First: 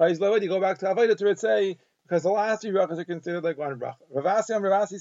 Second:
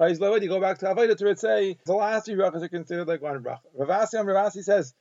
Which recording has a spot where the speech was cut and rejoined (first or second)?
second